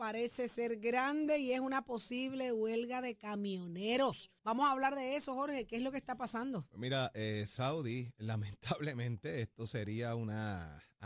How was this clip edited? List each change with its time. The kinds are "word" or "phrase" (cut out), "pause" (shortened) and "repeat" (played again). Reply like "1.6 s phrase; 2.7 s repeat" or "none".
4.4 s pause